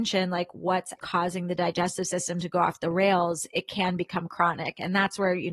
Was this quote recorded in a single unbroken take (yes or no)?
no